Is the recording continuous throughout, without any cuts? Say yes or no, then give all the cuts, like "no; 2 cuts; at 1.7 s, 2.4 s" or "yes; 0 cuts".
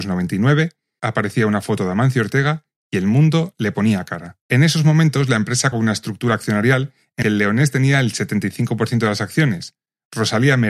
no; 4 cuts; at 1.0 s, 4.4 s, 5.7 s, 7.2 s